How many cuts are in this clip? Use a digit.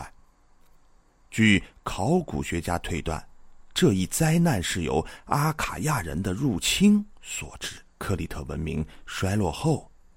1